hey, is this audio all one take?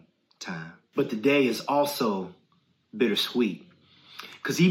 yes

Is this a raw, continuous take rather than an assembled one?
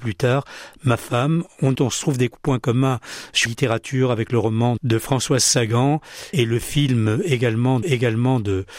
no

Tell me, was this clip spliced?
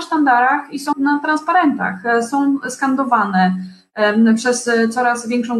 yes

